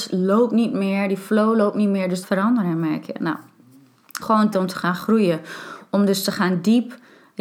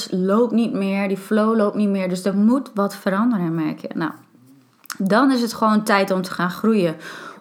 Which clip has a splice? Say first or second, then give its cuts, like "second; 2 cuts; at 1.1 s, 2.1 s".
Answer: first; 3 cuts; at 2.2 s, 4.2 s, 4.5 s